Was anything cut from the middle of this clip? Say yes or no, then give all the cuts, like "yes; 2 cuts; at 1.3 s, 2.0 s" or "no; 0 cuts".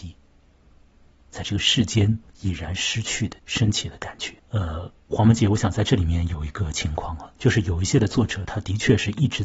yes; 3 cuts; at 2.3 s, 3.4 s, 4.4 s